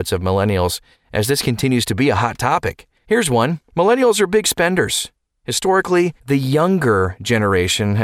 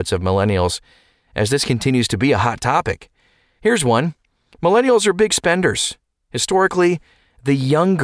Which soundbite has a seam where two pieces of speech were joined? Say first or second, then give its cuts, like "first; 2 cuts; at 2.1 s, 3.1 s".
first; 4 cuts; at 0.9 s, 3.0 s, 3.7 s, 6.2 s